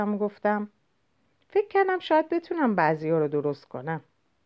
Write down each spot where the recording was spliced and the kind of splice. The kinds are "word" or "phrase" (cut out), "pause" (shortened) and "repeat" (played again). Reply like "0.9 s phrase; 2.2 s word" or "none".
none